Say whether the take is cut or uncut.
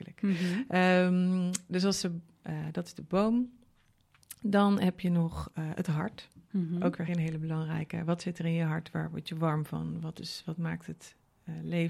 cut